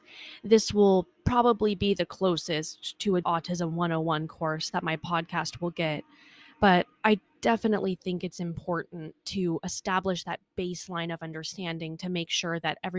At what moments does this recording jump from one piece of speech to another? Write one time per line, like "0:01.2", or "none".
0:03.2